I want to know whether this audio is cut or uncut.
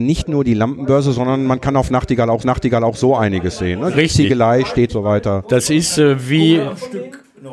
cut